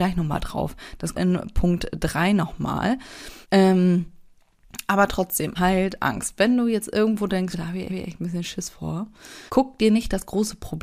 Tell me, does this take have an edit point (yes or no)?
yes